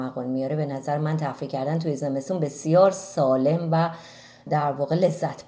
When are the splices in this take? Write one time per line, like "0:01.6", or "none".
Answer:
none